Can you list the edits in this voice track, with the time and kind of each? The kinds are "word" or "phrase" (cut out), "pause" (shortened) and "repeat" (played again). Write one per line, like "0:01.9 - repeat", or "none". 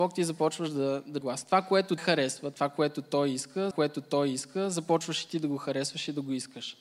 0:01.2 - phrase
0:02.0 - word
0:03.7 - repeat